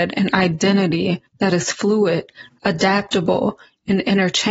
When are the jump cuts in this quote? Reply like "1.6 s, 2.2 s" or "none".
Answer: 1.3 s